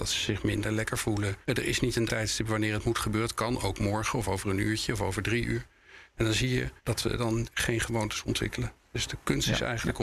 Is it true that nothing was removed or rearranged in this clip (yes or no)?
no